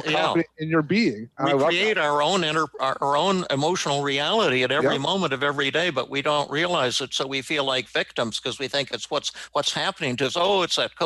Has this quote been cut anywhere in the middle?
no; 0 cuts

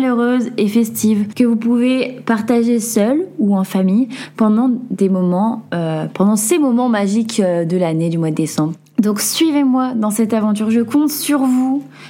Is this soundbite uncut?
yes; 0 cuts

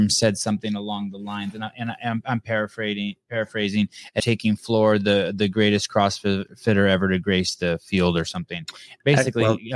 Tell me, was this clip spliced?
yes; 1 cut; at 4.2 s

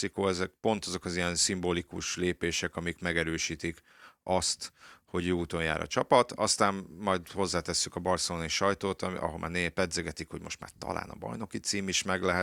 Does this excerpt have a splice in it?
no; 0 cuts

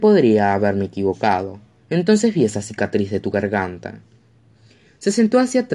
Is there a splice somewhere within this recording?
no; 0 cuts

